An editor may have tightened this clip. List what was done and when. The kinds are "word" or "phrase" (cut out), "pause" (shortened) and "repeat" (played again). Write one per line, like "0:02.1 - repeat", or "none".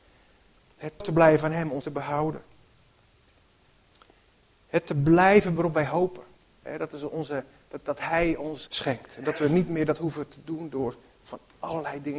0:01.0 - word
0:01.8 - word
0:05.6 - word
0:08.7 - word
0:10.4 - word